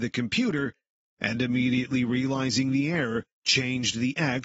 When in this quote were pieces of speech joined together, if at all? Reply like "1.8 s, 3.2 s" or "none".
none